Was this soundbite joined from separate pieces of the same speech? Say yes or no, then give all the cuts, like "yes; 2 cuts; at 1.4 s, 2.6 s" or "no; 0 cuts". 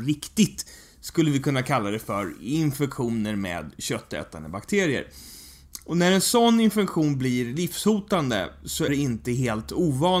yes; 1 cut; at 8.9 s